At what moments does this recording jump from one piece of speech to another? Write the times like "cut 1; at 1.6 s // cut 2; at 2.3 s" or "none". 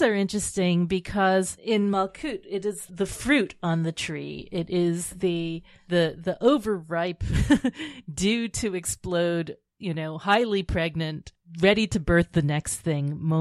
cut 1; at 1.6 s // cut 2; at 2.9 s